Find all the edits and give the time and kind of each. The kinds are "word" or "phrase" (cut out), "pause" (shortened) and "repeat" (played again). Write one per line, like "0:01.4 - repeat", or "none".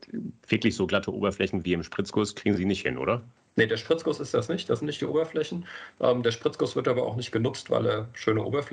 none